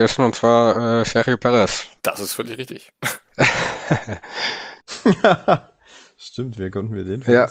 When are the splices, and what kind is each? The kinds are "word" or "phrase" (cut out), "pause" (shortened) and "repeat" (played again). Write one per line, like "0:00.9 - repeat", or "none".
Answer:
0:02.0 - pause